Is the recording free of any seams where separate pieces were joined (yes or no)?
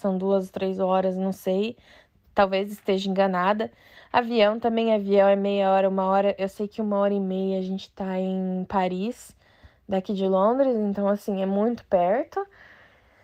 yes